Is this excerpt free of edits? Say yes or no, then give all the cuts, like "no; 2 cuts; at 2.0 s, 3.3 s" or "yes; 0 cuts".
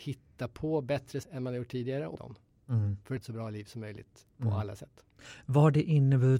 no; 3 cuts; at 1.2 s, 2.1 s, 3.2 s